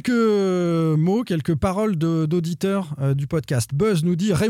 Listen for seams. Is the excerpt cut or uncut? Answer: uncut